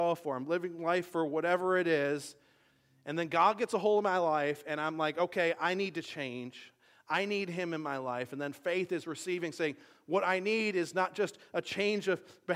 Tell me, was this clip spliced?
no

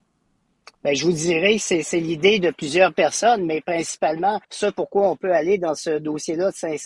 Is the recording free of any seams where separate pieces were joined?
no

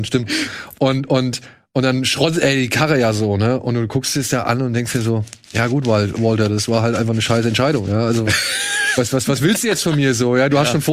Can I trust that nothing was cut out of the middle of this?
yes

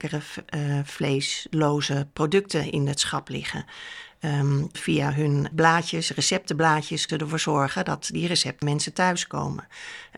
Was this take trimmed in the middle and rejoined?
yes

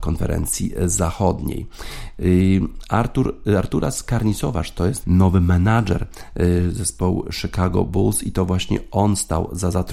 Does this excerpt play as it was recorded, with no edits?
no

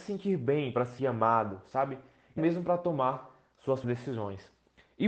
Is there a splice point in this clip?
yes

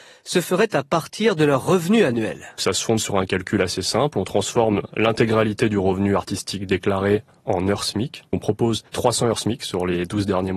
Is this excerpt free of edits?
no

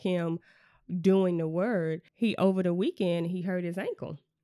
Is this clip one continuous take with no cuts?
no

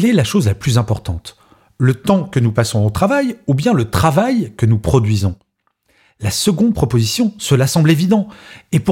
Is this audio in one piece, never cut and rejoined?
yes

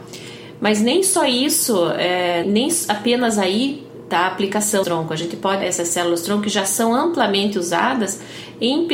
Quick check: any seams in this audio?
yes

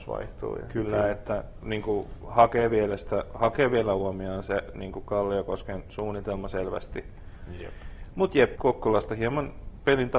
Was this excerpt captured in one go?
no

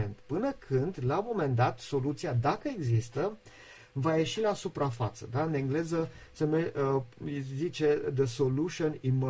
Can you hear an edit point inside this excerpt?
no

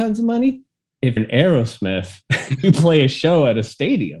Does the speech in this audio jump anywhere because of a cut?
yes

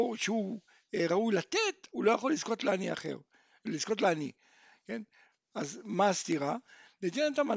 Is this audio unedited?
yes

